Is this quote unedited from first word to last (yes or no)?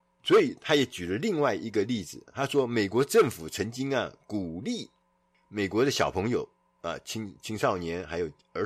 yes